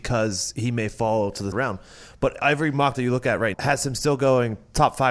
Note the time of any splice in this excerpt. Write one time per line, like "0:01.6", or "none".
0:01.5
0:02.9
0:03.5